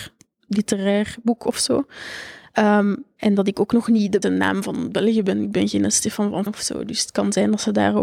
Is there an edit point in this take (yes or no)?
yes